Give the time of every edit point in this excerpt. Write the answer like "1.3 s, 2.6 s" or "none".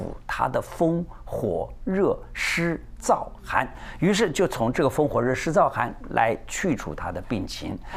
none

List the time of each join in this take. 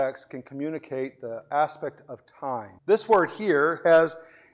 2.8 s

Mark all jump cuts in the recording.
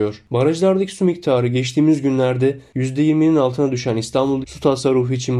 4.4 s

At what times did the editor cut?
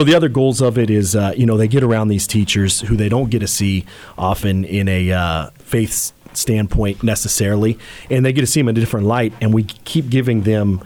none

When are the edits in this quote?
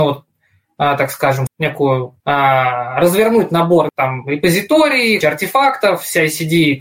1.5 s, 2.2 s, 3.9 s, 5.2 s

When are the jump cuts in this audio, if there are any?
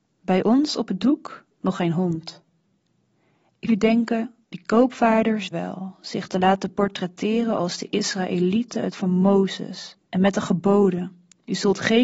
1.5 s, 3.7 s, 4.4 s, 5.5 s, 8.9 s, 10.0 s

